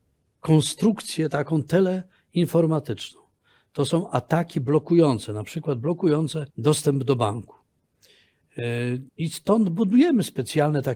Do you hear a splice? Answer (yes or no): yes